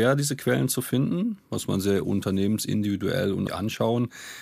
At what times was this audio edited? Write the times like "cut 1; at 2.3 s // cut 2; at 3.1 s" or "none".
cut 1; at 1.7 s // cut 2; at 3.5 s